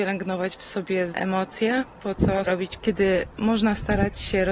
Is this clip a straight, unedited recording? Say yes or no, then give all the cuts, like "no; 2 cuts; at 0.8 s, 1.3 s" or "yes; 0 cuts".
no; 3 cuts; at 1.1 s, 2.5 s, 2.8 s